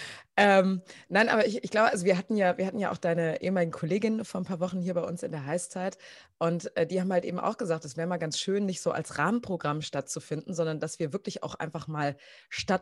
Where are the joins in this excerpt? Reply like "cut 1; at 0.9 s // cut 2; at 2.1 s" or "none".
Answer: none